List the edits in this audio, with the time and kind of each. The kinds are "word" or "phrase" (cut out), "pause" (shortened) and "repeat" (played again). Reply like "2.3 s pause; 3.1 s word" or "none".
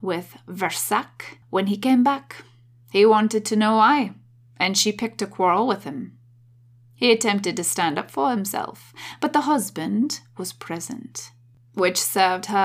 none